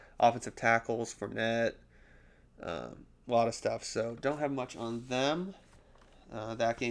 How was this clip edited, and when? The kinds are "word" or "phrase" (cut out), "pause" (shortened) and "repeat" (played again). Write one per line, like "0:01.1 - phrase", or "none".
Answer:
none